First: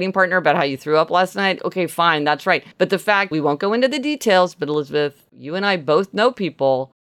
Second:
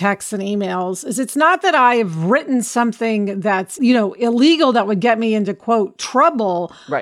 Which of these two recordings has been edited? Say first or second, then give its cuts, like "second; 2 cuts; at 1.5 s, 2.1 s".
first; 2 cuts; at 2.7 s, 3.3 s